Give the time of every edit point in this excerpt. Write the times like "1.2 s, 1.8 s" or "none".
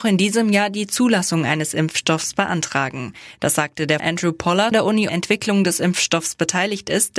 4.0 s, 4.7 s, 5.1 s